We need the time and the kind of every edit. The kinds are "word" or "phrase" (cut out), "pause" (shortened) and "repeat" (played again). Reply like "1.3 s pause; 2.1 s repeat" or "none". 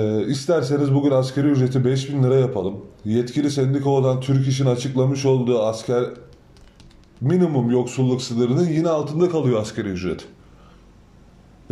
none